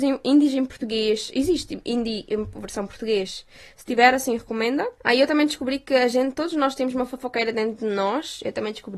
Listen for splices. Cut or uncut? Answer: uncut